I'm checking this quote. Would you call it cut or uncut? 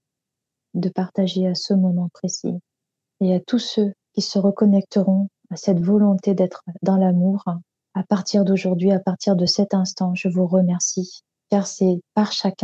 uncut